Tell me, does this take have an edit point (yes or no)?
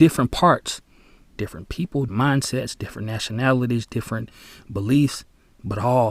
yes